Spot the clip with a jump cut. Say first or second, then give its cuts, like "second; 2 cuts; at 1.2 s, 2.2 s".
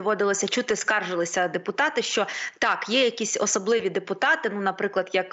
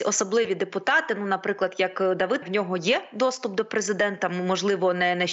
second; 1 cut; at 2.4 s